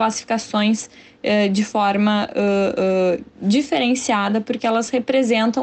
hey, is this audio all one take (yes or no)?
yes